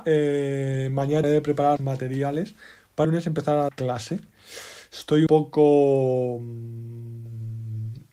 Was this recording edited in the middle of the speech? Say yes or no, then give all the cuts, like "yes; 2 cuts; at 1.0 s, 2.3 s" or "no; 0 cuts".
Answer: yes; 5 cuts; at 1.2 s, 1.8 s, 3.0 s, 3.7 s, 5.3 s